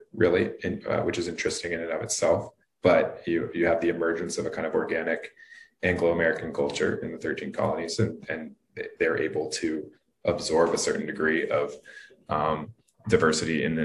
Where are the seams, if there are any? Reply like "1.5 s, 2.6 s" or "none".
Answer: none